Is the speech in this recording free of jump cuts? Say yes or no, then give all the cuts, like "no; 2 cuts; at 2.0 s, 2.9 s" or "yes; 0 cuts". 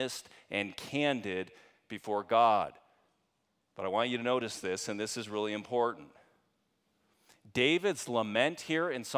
yes; 0 cuts